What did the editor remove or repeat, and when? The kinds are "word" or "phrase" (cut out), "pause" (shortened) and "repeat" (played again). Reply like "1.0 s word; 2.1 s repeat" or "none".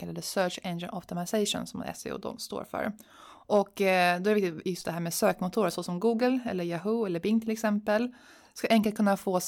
none